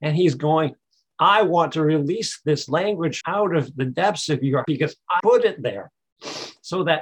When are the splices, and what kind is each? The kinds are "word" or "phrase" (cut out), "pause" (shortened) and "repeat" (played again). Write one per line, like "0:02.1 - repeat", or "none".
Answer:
0:03.2 - word
0:04.6 - word
0:05.2 - word